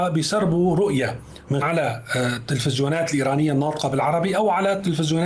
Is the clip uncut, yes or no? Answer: no